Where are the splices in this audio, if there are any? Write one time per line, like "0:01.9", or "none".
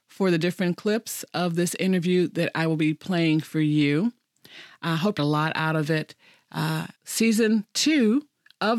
0:05.2
0:07.0